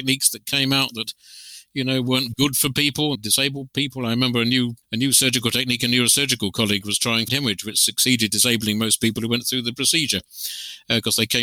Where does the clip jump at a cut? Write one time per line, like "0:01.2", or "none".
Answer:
0:03.1
0:04.8
0:07.3
0:08.3